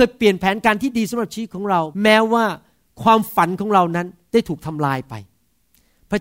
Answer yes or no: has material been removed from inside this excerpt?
yes